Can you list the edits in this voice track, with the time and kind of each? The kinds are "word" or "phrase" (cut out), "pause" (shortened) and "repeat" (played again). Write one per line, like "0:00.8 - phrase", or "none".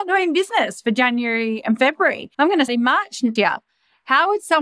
0:02.3 - pause
0:02.7 - word
0:03.4 - word